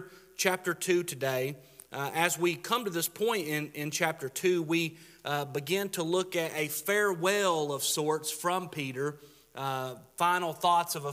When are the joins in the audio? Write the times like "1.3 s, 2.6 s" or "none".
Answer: none